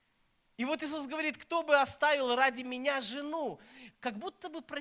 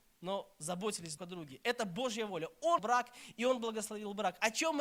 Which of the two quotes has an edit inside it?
second; 2 cuts; at 1.2 s, 2.8 s

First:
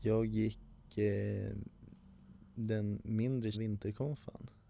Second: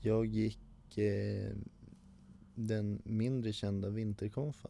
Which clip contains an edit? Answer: first; 1 cut; at 3.5 s

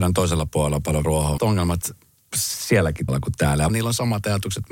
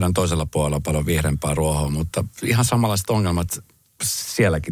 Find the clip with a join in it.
first; 4 cuts; at 1.0 s, 1.4 s, 3.1 s, 3.7 s

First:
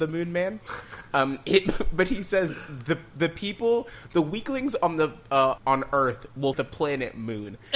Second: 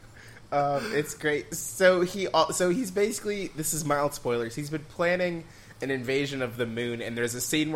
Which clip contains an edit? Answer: first; 2 cuts; at 5.6 s, 6.5 s

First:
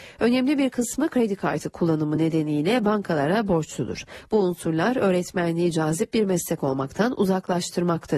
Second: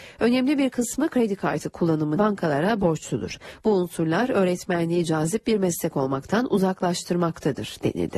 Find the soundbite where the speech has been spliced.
second; 1 cut; at 2.2 s

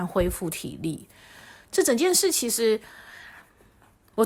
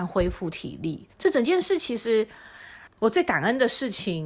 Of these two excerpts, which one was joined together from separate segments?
second; 2 cuts; at 1.1 s, 2.9 s

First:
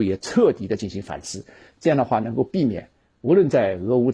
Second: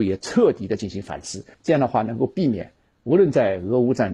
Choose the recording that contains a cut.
second; 1 cut; at 1.5 s

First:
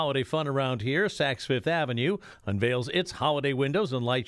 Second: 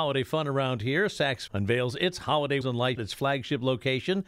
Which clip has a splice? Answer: second; 3 cuts; at 1.5 s, 2.6 s, 3.0 s

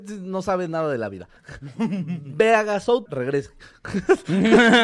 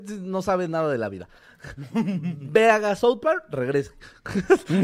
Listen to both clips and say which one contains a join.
first; 2 cuts; at 1.4 s, 3.1 s

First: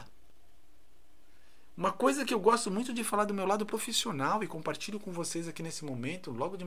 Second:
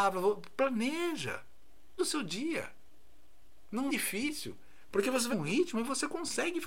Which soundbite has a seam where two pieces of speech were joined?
second; 3 cuts; at 2.0 s, 3.9 s, 5.3 s

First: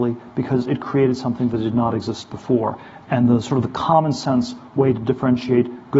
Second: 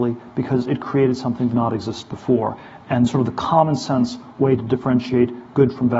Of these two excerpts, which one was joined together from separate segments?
second; 2 cuts; at 1.5 s, 3.1 s

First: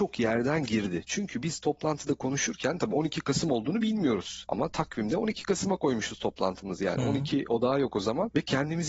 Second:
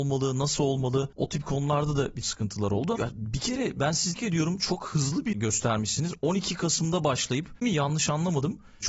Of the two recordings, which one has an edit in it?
second; 5 cuts; at 2.2 s, 3.0 s, 4.2 s, 5.3 s, 7.6 s

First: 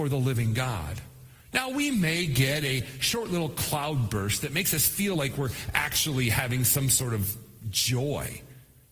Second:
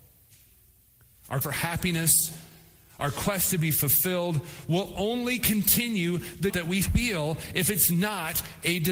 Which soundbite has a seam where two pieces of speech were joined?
second; 2 cuts; at 1.4 s, 6.5 s

